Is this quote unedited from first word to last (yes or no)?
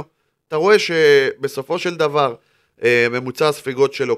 yes